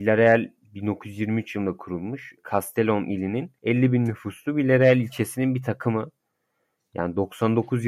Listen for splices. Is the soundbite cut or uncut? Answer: cut